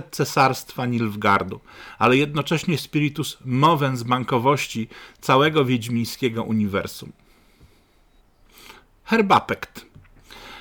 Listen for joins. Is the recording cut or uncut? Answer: uncut